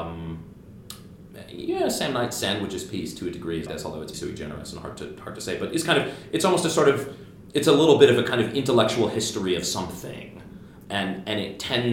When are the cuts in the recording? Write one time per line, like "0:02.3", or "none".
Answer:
0:03.7
0:04.1
0:10.8